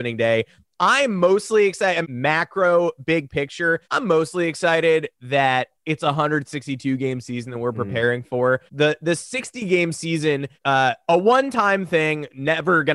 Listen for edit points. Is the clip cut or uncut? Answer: cut